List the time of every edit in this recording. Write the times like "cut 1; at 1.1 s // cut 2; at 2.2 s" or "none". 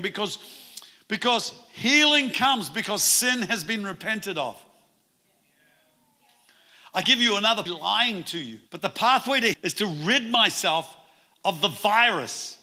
cut 1; at 7.0 s // cut 2; at 7.7 s // cut 3; at 8.7 s // cut 4; at 9.5 s